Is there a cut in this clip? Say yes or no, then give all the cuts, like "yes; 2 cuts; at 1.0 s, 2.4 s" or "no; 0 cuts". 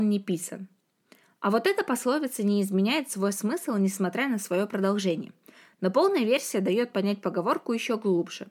no; 0 cuts